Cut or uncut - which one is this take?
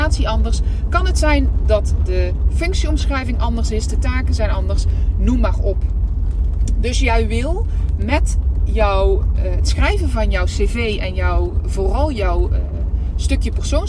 uncut